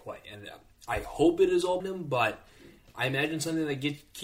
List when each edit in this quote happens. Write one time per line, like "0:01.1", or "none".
0:01.8

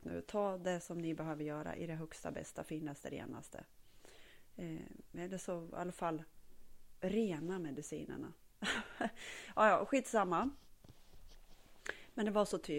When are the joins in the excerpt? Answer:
none

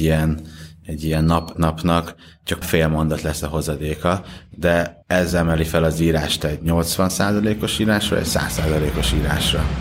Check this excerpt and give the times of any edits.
0:01.5
0:02.6
0:05.0

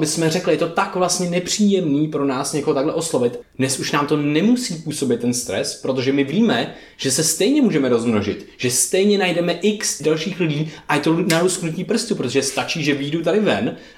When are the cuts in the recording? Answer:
0:03.4
0:10.0

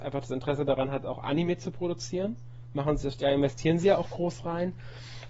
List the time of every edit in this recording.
none

